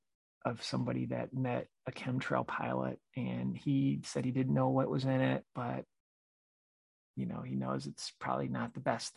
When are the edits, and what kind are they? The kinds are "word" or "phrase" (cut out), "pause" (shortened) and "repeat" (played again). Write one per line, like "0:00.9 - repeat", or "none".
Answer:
none